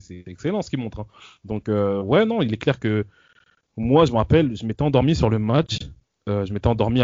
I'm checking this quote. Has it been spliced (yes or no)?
no